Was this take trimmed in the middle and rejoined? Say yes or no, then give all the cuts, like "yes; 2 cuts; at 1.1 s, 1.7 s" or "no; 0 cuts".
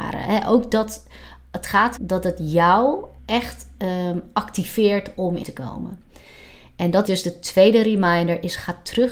yes; 4 cuts; at 2.0 s, 3.2 s, 5.4 s, 7.1 s